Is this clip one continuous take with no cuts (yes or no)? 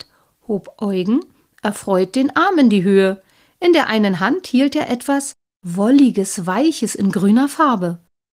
yes